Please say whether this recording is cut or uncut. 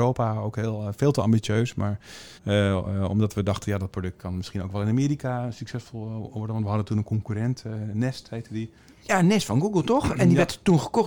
cut